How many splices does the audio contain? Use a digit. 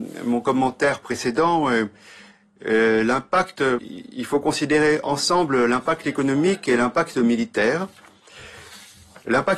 1